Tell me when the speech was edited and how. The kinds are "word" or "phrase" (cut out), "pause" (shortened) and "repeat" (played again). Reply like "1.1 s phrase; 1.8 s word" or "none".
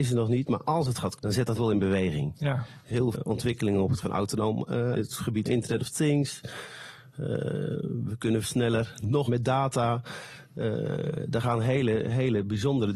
1.2 s word; 1.6 s word; 3.1 s word; 4.0 s word; 4.9 s word; 5.4 s word; 8.4 s word; 9.3 s word